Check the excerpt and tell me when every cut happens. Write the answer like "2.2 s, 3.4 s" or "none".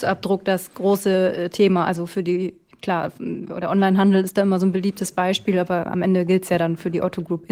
none